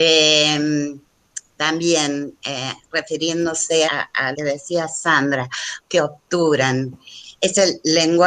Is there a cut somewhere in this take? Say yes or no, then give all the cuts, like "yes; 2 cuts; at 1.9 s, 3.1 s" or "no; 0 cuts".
yes; 3 cuts; at 3.9 s, 4.3 s, 5.8 s